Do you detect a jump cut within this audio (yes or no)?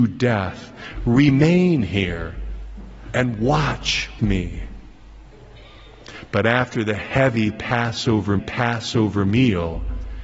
yes